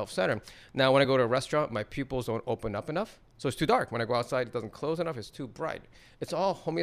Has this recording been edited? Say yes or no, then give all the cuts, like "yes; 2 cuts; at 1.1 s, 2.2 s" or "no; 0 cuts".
no; 0 cuts